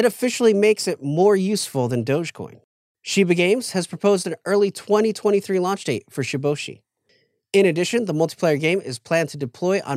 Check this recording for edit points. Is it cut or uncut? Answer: uncut